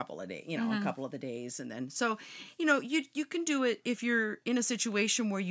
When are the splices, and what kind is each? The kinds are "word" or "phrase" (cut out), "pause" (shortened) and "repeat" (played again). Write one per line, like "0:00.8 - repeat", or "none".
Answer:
none